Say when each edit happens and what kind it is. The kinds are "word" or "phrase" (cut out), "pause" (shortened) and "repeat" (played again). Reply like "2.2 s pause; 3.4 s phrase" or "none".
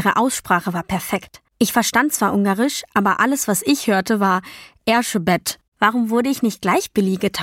1.5 s pause; 5.7 s pause